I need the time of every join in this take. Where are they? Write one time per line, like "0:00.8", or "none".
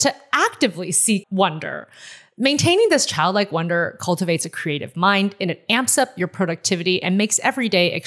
0:01.2